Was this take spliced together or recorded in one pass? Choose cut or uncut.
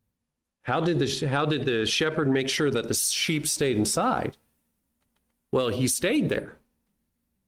uncut